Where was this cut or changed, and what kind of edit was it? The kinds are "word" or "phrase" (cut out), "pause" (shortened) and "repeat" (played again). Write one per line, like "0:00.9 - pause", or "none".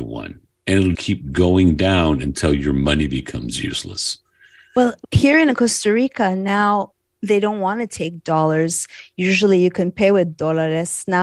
0:00.9 - word